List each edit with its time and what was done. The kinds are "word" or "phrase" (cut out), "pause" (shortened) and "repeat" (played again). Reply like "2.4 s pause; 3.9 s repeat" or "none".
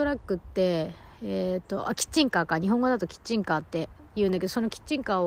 4.1 s pause